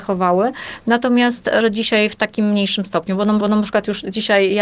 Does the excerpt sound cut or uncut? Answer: cut